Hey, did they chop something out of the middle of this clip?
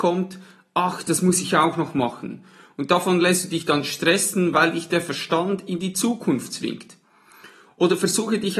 no; 0 cuts

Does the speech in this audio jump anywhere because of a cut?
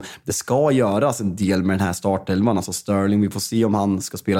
no; 0 cuts

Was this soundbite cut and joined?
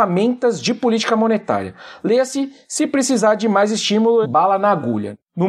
yes; 1 cut; at 4.2 s

